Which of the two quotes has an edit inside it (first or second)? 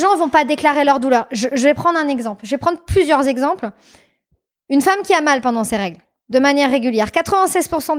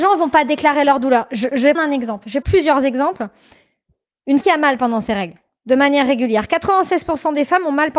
second